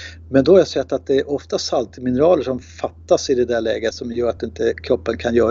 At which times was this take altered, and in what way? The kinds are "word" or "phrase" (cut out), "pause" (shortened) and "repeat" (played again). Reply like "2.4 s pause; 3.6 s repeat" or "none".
none